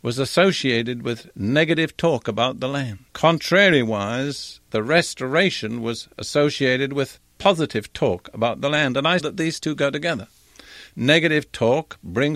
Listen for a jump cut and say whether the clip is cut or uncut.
cut